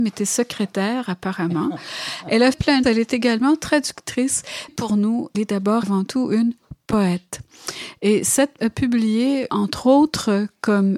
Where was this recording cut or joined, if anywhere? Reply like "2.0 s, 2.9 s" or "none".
2.5 s, 2.8 s, 4.7 s, 5.3 s, 5.8 s, 8.6 s, 9.5 s